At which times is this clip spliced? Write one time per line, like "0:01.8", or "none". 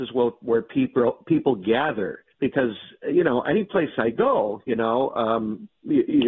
0:02.3